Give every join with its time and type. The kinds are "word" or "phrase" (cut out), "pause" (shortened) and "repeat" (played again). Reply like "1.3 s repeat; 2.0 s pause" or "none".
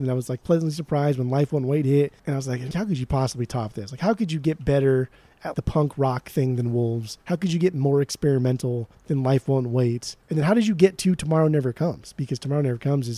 2.2 s pause; 2.7 s word; 5.5 s word; 7.2 s pause; 8.9 s pause; 10.2 s pause